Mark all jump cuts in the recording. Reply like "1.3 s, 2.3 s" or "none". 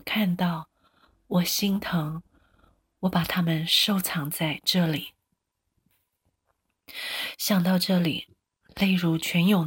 none